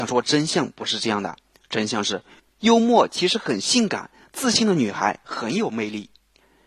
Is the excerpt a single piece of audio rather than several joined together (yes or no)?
yes